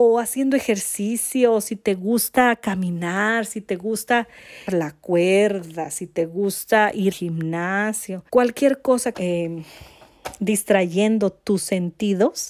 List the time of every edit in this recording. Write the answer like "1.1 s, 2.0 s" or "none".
4.7 s, 7.1 s, 8.3 s, 9.1 s

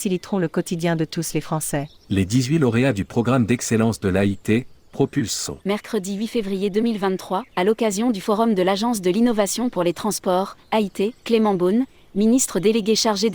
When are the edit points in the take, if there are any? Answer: 2.0 s, 5.6 s, 7.5 s, 11.2 s

